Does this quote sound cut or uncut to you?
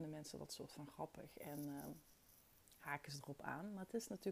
uncut